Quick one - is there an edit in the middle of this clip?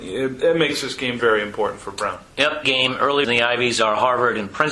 yes; 3 cuts; at 1.2 s, 2.6 s, 3.2 s

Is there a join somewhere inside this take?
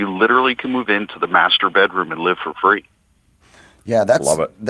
no; 0 cuts

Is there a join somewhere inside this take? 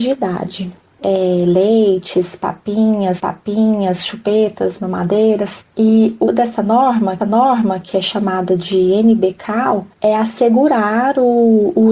yes; 5 cuts; at 3.2 s, 5.7 s, 6.2 s, 7.2 s, 9.9 s

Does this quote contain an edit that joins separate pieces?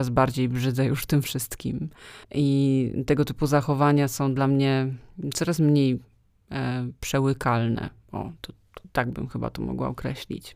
yes; 1 cut; at 2.2 s

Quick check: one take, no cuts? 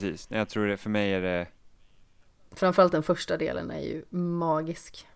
yes; 0 cuts

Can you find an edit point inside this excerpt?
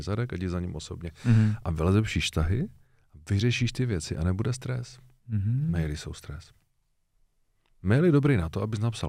no; 0 cuts

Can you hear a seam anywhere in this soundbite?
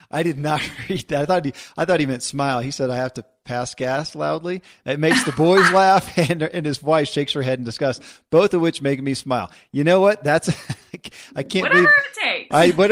no; 0 cuts

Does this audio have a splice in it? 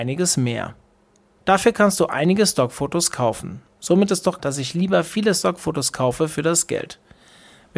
yes; 1 cut; at 4.4 s

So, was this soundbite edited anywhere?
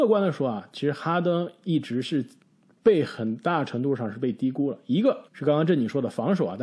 yes; 2 cuts; at 2.4 s, 5.3 s

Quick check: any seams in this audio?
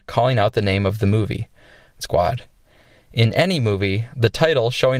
yes; 1 cut; at 2.0 s

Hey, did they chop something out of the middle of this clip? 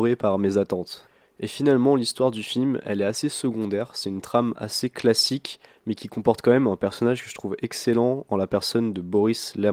no; 0 cuts

